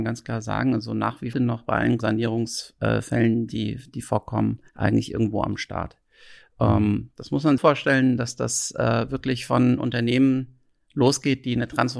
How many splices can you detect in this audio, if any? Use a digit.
4